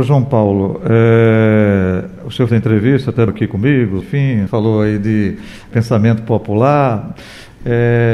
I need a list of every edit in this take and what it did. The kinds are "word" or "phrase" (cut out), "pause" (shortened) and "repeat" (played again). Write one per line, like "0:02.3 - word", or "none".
0:02.5 - phrase
0:03.3 - word
0:04.0 - word
0:04.5 - word
0:05.7 - word